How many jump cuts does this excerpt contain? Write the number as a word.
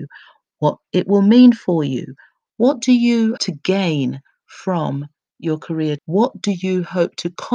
two